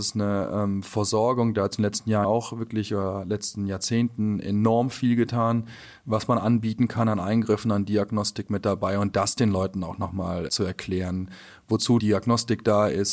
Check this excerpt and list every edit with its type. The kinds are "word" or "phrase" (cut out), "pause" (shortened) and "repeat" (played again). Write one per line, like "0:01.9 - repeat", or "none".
0:02.2 - word
0:10.5 - word
0:12.0 - word